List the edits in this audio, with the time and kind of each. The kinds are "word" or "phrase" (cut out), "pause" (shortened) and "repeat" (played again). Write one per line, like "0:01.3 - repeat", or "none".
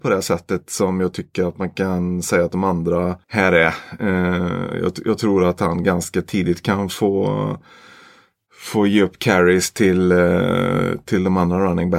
0:03.2 - pause